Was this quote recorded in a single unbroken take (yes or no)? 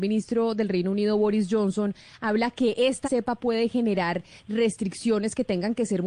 no